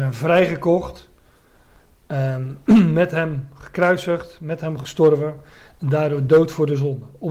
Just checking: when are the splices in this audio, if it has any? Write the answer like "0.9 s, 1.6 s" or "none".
none